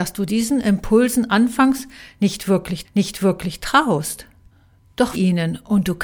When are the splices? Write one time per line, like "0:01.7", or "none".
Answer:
0:02.8
0:05.1